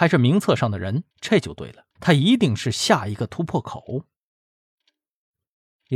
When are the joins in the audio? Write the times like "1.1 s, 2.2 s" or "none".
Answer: 1.1 s, 1.9 s